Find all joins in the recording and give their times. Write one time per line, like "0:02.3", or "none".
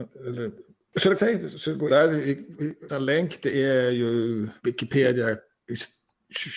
0:01.2
0:01.5
0:01.9
0:02.9
0:04.6